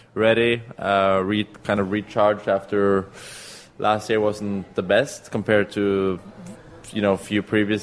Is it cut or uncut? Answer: cut